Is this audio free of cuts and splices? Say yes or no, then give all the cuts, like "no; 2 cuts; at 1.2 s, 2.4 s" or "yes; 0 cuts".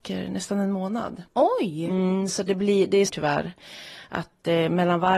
no; 2 cuts; at 1.3 s, 3.1 s